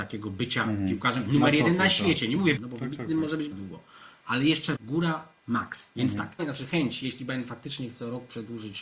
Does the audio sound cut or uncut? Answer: cut